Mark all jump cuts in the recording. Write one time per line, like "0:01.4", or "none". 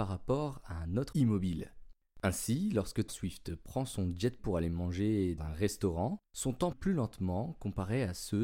0:01.1
0:03.1
0:04.4
0:05.4
0:06.7